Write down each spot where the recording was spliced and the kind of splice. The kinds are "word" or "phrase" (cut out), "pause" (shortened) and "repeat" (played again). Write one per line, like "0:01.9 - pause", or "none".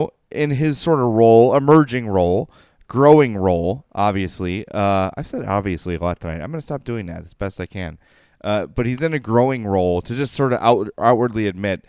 none